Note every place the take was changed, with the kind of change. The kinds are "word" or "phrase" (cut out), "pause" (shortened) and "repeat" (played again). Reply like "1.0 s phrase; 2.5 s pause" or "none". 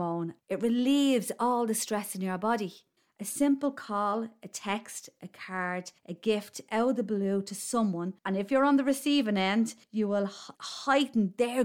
3.0 s pause; 6.0 s pause; 8.2 s pause; 9.8 s pause; 10.6 s pause